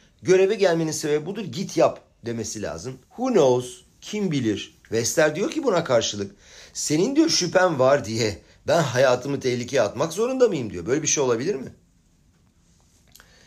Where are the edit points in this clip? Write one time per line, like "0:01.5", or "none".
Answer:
0:03.0
0:04.8